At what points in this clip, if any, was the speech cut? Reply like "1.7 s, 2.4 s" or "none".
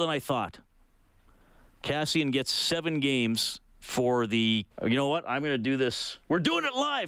4.7 s